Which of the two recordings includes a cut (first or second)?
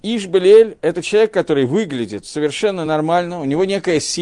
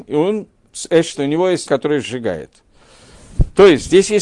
second